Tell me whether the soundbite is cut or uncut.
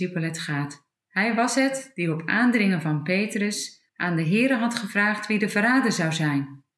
cut